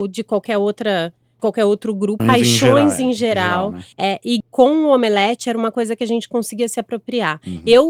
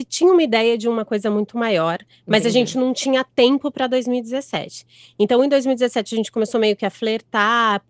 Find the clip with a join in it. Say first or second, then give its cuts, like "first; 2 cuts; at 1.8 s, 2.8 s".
first; 4 cuts; at 1.4 s, 2.2 s, 3.9 s, 4.4 s